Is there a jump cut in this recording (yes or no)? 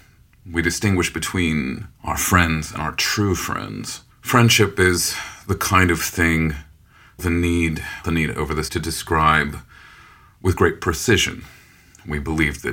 yes